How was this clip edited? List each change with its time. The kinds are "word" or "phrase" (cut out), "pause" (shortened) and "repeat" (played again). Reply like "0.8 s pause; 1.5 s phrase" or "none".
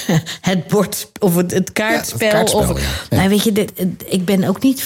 3.7 s word

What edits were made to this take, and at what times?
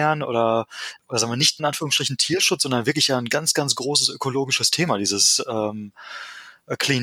1.0 s pause; 1.6 s word

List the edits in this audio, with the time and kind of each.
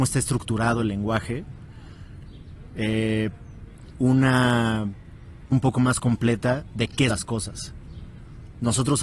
3.9 s phrase; 5.5 s word; 7.1 s word

